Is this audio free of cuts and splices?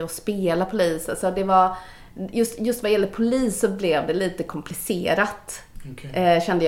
yes; 0 cuts

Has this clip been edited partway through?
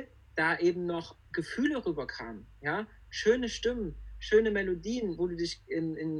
yes; 1 cut; at 5.2 s

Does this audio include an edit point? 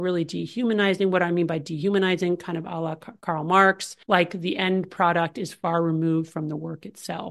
yes; 1 cut; at 4.0 s

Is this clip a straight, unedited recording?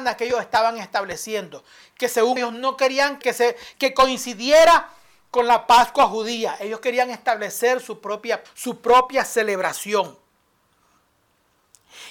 no; 4 cuts; at 2.4 s, 3.2 s, 3.7 s, 8.4 s

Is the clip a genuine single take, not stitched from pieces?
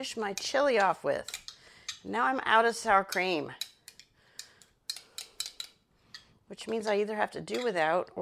yes; 0 cuts

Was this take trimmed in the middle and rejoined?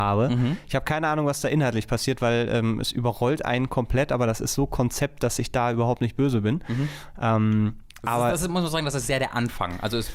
no; 0 cuts

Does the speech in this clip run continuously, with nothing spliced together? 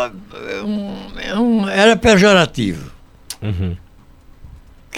yes; 0 cuts

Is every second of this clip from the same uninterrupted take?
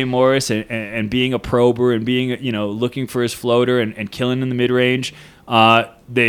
yes; 0 cuts

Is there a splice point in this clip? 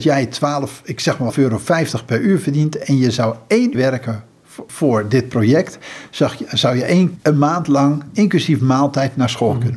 yes; 3 cuts; at 1.3 s, 3.7 s, 7.2 s

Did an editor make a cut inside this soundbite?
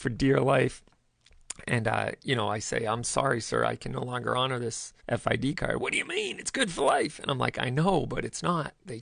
yes; 1 cut; at 5.0 s

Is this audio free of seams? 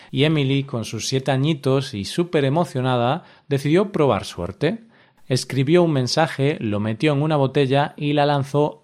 yes; 0 cuts

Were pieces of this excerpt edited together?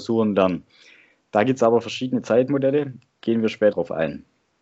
yes; 1 cut; at 3.7 s

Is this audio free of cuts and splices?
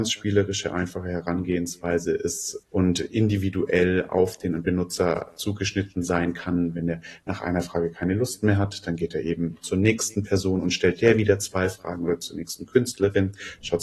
no; 1 cut; at 2.6 s

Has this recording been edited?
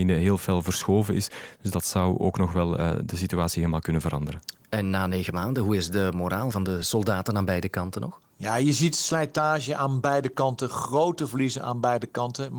no; 0 cuts

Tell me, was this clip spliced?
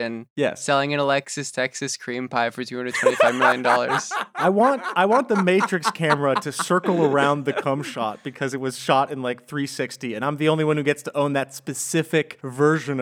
no; 0 cuts

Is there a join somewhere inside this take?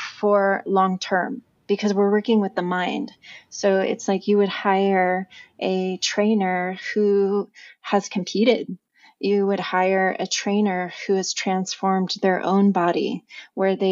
no; 0 cuts

